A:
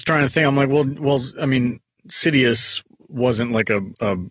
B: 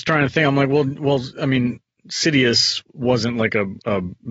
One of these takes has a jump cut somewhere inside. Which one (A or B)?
B